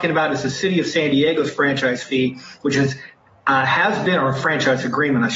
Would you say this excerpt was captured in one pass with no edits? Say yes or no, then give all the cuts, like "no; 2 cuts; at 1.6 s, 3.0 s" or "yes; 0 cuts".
yes; 0 cuts